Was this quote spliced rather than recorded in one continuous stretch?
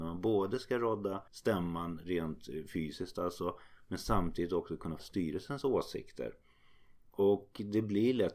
yes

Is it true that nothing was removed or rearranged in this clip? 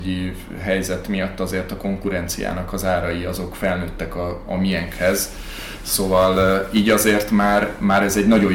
yes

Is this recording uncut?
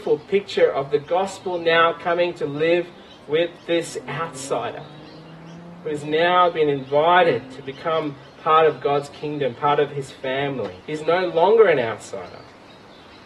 no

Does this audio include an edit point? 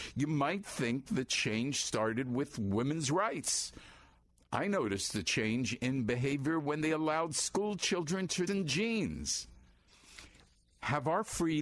yes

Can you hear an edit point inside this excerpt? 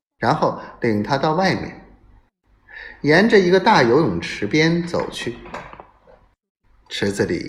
no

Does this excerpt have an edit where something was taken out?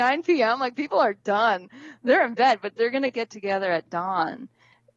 no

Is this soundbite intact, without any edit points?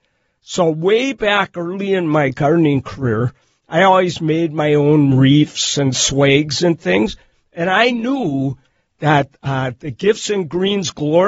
yes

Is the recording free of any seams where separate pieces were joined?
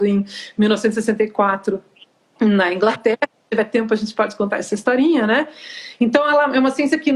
yes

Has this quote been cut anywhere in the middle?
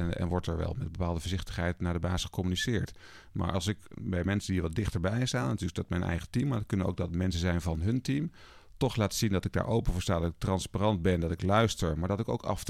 no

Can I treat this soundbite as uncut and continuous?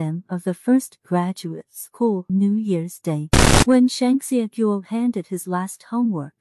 no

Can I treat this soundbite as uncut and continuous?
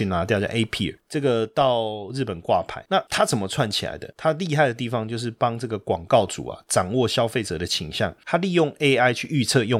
yes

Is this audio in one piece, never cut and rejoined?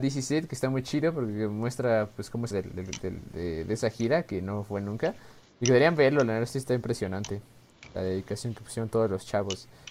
no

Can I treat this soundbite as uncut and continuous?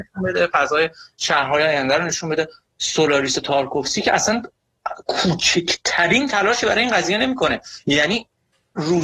yes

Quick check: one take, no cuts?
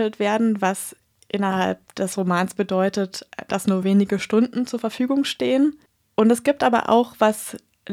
yes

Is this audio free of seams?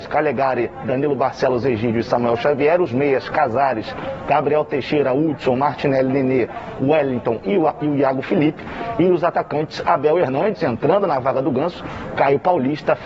yes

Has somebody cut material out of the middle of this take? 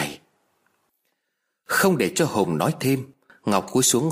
no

